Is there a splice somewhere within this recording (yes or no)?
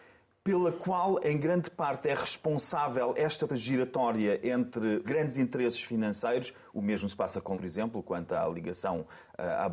yes